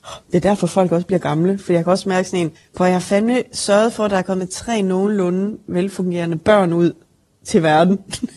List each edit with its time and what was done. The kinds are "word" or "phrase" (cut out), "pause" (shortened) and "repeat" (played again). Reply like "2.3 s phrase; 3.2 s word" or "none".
2.6 s pause